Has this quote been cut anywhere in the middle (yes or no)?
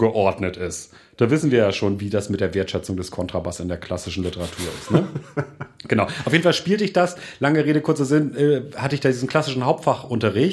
no